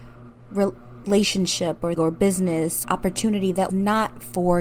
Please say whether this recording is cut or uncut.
cut